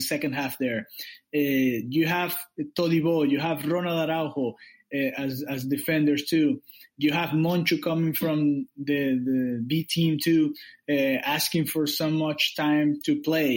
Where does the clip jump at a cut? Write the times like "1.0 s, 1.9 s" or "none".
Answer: none

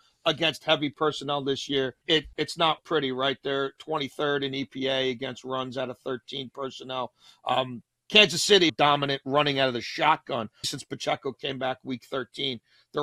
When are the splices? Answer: 2.0 s, 2.3 s, 2.8 s, 3.8 s, 8.7 s, 10.6 s

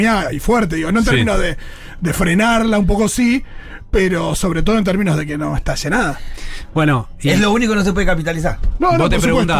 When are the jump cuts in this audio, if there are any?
none

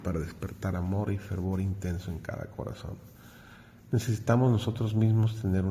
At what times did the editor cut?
none

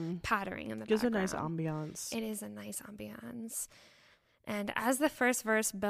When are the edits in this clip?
none

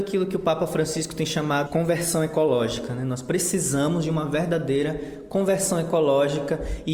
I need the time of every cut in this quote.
1.7 s

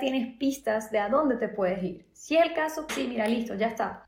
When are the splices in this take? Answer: 2.9 s

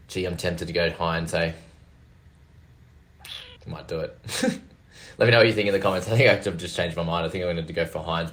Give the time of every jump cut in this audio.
3.6 s

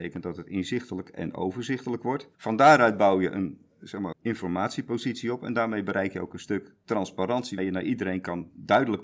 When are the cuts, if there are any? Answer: 2.3 s, 4.1 s, 7.6 s

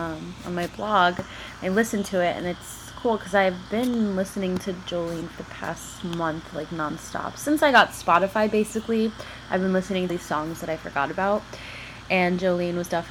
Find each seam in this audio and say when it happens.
5.4 s, 10.1 s

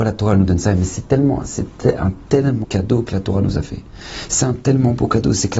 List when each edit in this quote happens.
2.6 s

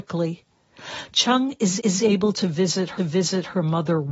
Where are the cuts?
1.8 s, 3.0 s

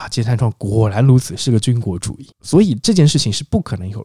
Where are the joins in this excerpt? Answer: 2.3 s

